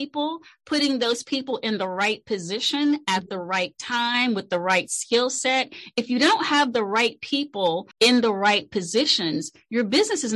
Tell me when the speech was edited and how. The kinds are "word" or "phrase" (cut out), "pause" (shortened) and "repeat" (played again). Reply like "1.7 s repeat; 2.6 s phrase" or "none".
7.9 s pause